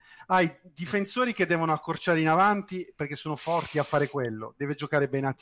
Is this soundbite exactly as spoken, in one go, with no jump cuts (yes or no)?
yes